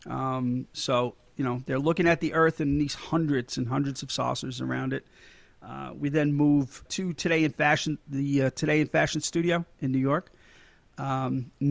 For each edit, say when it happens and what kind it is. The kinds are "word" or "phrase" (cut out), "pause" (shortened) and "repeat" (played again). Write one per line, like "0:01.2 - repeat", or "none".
0:06.9 - word